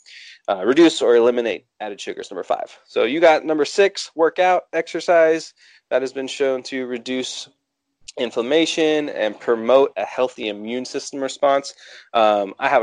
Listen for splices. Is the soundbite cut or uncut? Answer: uncut